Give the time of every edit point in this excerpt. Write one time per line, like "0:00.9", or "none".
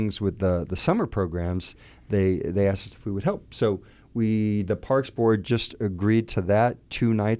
none